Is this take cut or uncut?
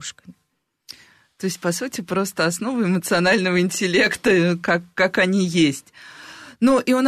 uncut